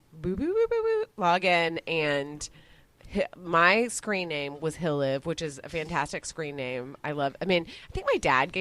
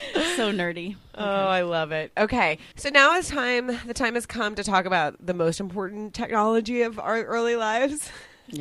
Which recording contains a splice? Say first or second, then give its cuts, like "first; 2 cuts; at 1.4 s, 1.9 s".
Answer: second; 1 cut; at 2.7 s